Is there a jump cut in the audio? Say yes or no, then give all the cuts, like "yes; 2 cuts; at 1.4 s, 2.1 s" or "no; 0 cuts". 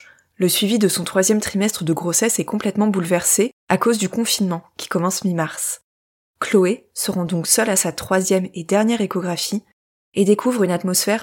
no; 0 cuts